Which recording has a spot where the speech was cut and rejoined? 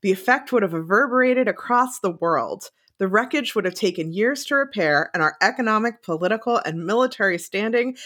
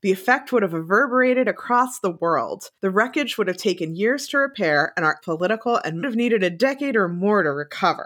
second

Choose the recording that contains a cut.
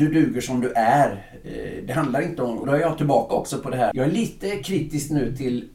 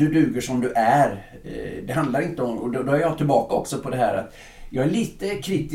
first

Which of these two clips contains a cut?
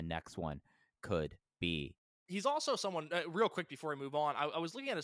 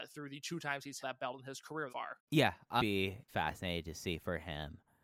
second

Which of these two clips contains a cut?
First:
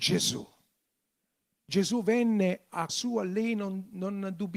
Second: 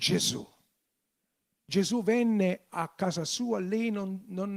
first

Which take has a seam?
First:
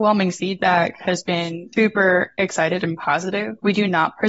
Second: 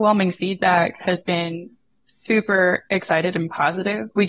first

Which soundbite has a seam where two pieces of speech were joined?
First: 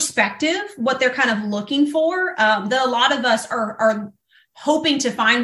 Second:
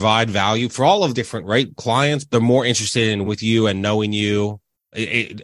second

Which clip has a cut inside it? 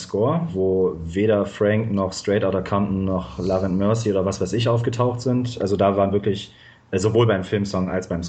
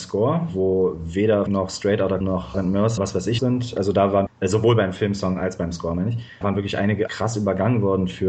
second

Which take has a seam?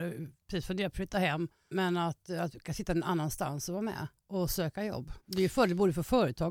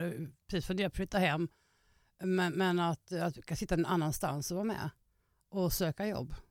first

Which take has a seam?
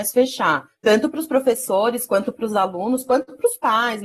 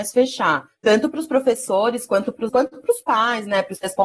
second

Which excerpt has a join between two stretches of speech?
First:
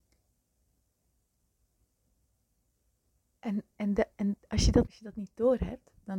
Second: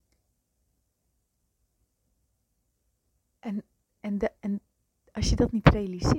first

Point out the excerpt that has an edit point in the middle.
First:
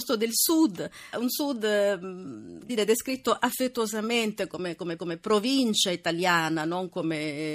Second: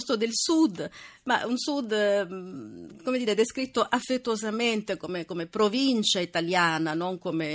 first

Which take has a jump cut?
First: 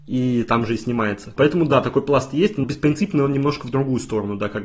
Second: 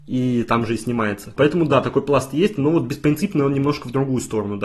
first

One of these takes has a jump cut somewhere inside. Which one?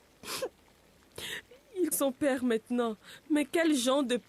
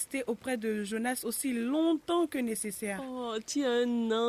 first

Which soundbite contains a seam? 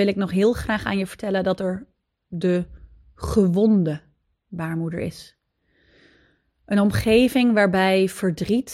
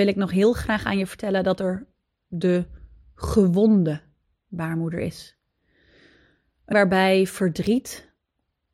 second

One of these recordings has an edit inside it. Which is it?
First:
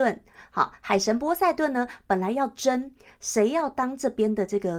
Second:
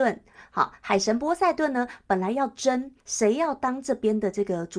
second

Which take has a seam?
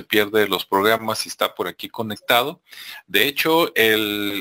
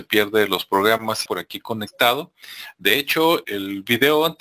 second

